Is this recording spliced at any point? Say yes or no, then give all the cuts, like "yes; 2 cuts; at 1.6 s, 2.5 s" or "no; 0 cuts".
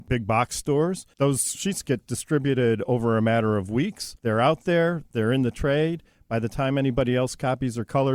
no; 0 cuts